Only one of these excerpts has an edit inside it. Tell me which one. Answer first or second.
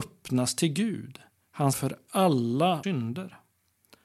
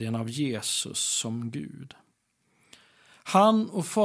first